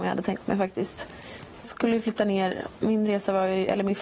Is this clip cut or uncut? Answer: cut